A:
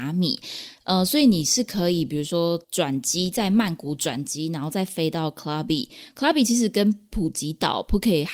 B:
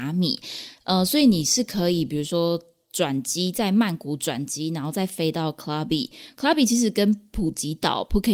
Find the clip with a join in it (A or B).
A